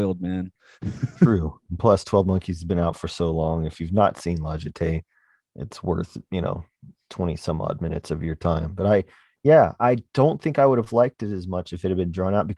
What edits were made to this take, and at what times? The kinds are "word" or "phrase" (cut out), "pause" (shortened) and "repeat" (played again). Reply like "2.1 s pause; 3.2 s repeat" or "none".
none